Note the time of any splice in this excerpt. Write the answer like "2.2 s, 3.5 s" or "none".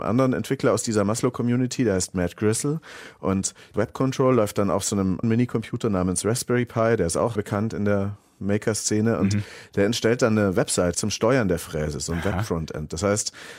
3.7 s, 5.2 s, 7.4 s, 10.9 s